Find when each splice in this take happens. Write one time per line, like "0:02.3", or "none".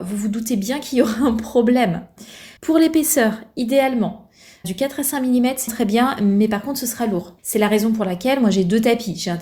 0:02.6
0:04.6
0:05.7
0:07.4